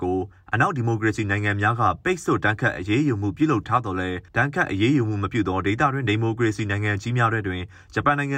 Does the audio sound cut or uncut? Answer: cut